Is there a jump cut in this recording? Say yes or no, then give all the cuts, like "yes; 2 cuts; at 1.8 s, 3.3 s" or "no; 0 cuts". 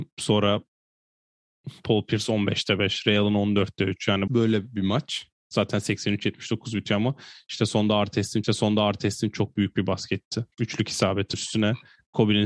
yes; 4 cuts; at 4.3 s, 8.4 s, 10.5 s, 11.3 s